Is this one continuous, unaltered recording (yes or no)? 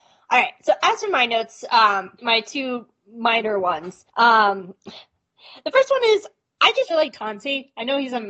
no